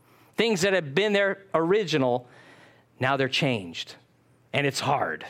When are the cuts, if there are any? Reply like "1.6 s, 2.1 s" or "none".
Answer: none